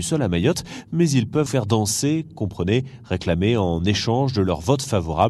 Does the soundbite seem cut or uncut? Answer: cut